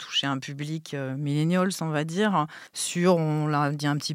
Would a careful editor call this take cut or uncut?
cut